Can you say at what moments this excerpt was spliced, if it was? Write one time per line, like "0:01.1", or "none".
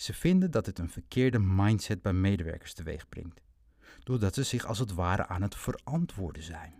none